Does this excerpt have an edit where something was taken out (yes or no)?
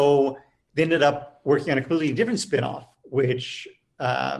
no